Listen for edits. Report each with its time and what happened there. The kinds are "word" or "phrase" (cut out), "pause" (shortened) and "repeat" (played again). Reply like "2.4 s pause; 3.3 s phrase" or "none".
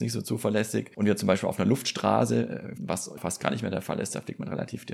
2.8 s word; 3.2 s word